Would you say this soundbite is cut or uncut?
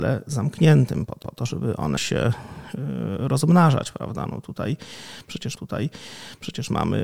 cut